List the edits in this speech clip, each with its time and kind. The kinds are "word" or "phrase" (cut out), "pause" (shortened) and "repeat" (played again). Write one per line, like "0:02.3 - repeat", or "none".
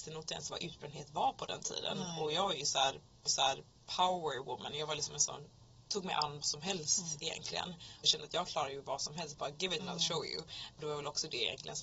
0:03.3 - repeat
0:05.8 - phrase
0:06.4 - word
0:08.0 - word
0:09.8 - phrase